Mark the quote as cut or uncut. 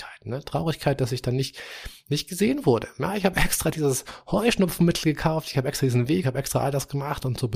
cut